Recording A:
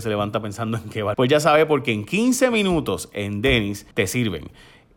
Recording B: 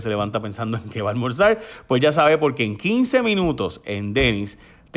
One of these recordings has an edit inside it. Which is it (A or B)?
A